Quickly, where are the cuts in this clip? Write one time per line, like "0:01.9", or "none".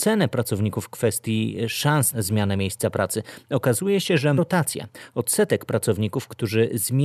0:02.1
0:04.4